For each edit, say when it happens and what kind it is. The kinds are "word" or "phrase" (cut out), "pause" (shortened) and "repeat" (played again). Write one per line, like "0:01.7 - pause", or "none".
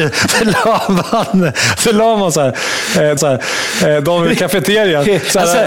0:03.2 - repeat